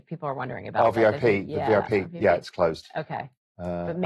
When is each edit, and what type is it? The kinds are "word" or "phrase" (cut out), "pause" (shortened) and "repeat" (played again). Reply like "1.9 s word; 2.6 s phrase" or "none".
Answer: none